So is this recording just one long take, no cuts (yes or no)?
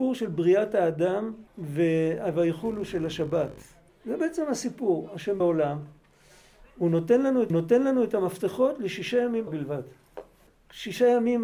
no